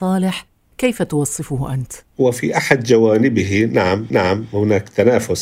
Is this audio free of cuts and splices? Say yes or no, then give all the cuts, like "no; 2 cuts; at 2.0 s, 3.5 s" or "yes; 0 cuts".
no; 2 cuts; at 2.1 s, 4.1 s